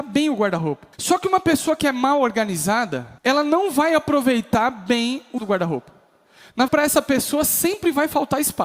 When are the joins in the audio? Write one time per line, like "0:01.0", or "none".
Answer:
0:00.9
0:03.2
0:05.4
0:06.7